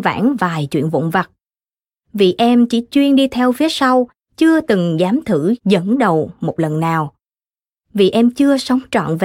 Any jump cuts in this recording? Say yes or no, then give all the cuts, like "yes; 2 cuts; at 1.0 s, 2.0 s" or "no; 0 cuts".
no; 0 cuts